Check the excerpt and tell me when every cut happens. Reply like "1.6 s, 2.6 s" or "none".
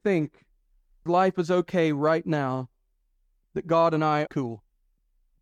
1.1 s, 4.3 s

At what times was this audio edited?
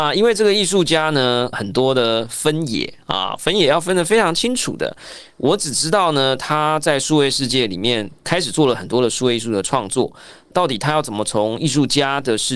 1.5 s, 10.5 s

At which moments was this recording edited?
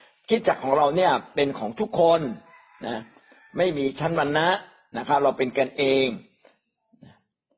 none

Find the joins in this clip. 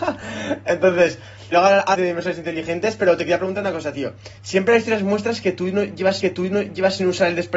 1.5 s, 1.9 s, 4.4 s, 6.2 s

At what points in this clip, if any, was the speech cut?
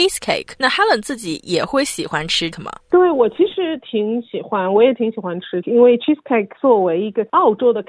2.5 s, 5.6 s, 6.6 s

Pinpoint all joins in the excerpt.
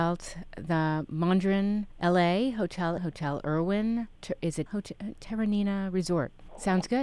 1.9 s, 3.0 s, 4.1 s, 4.7 s

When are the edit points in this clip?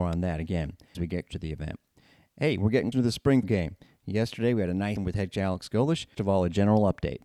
0.9 s, 1.3 s, 2.9 s, 3.4 s, 5.0 s, 5.3 s, 6.1 s

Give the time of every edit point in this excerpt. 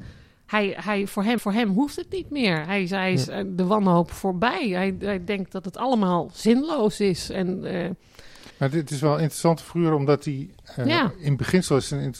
1.4 s, 8.5 s

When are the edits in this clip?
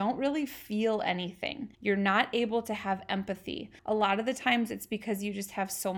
1.7 s, 3.8 s

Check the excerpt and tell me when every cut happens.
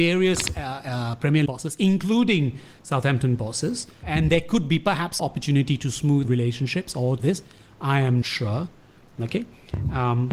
1.5 s, 4.0 s, 5.2 s, 6.2 s, 7.2 s, 8.2 s

